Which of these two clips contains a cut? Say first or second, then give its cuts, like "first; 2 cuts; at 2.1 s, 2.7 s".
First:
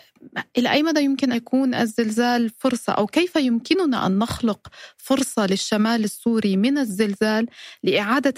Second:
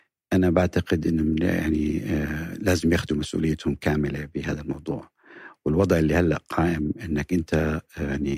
first; 1 cut; at 1.3 s